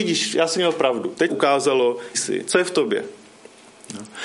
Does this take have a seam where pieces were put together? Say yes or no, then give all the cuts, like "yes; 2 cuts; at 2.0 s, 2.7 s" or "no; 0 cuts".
yes; 2 cuts; at 1.3 s, 2.1 s